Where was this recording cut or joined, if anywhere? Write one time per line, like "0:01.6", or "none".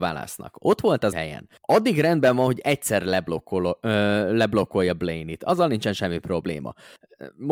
0:01.1
0:01.6